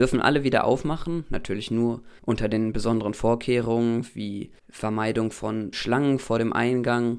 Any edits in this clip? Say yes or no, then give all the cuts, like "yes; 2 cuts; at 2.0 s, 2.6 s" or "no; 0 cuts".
yes; 3 cuts; at 2.2 s, 4.6 s, 5.7 s